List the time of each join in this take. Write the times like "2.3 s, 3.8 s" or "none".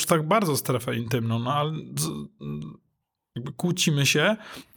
none

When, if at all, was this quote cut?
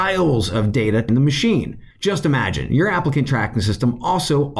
1.1 s, 1.9 s

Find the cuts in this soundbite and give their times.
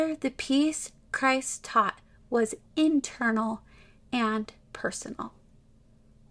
2.6 s, 4.6 s

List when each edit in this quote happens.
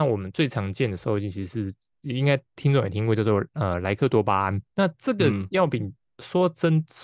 none

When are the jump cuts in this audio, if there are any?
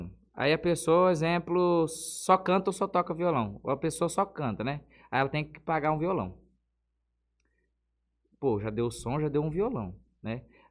none

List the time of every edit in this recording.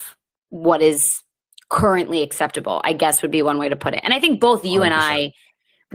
1.4 s

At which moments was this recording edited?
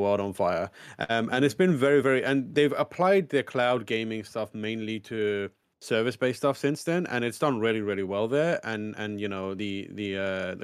none

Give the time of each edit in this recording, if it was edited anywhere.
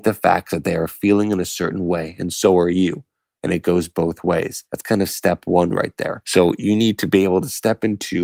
none

